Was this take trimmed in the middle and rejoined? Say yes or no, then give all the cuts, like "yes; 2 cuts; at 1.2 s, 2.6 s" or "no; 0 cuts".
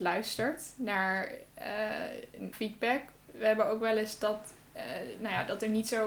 yes; 1 cut; at 2.5 s